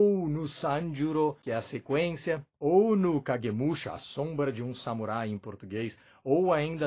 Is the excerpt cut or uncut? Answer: uncut